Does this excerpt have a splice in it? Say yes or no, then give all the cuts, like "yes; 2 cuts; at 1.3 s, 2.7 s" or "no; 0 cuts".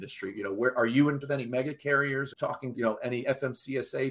yes; 3 cuts; at 1.2 s, 2.3 s, 2.7 s